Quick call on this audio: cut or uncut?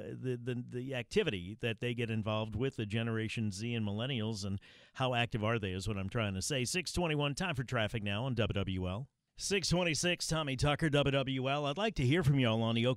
cut